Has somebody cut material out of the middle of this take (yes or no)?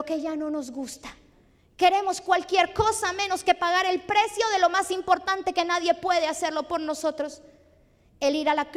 no